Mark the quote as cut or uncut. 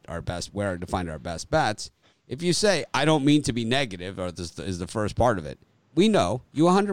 uncut